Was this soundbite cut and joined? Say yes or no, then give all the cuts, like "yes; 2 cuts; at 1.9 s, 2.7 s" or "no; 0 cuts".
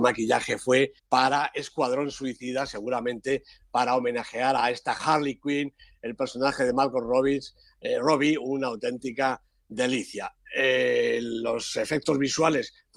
yes; 1 cut; at 1.0 s